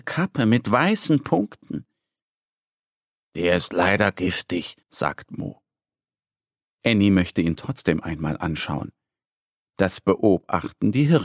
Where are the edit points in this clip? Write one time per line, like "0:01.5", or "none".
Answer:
0:04.8